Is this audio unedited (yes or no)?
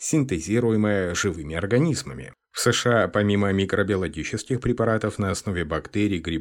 yes